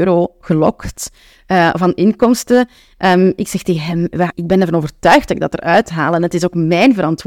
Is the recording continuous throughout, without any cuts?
no; 1 cut; at 4.3 s

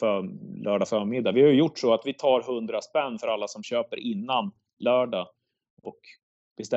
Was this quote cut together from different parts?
no; 0 cuts

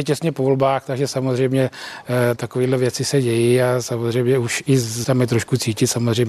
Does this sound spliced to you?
yes; 2 cuts; at 2.4 s, 5.0 s

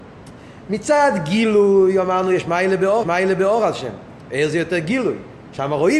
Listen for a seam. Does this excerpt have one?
yes; 1 cut; at 3.0 s

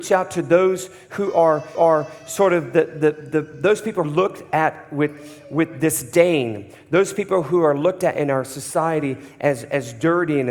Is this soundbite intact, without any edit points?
no; 2 cuts; at 1.7 s, 4.0 s

